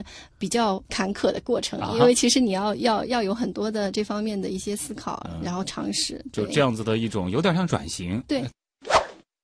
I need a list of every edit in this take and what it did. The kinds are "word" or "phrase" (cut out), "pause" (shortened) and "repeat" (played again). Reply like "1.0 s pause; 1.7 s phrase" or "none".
none